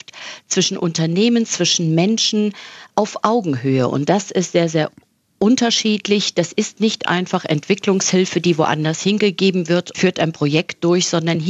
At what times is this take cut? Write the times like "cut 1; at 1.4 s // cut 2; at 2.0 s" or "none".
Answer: cut 1; at 9.9 s